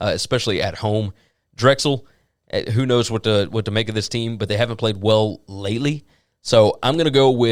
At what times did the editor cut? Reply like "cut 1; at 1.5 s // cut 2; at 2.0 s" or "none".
none

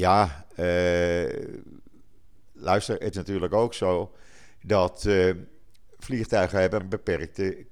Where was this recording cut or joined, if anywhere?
cut 1; at 3.1 s // cut 2; at 6.8 s

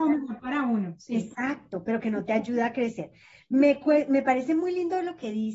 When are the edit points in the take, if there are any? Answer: none

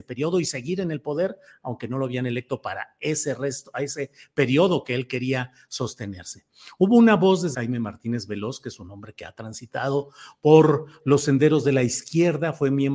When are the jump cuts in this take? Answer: cut 1; at 7.5 s

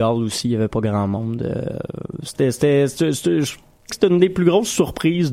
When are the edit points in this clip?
cut 1; at 3.9 s

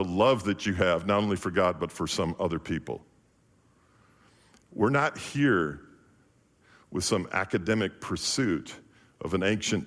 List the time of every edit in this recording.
none

